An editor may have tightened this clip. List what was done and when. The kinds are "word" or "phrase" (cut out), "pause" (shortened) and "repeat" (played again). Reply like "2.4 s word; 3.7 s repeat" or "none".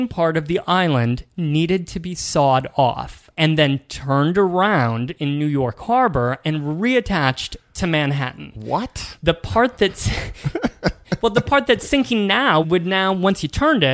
3.3 s pause; 12.6 s word